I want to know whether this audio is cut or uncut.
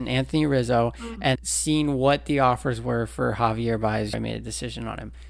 cut